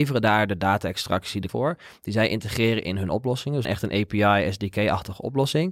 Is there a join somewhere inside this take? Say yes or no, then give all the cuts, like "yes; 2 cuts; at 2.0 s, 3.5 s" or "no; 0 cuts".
yes; 2 cuts; at 1.5 s, 3.6 s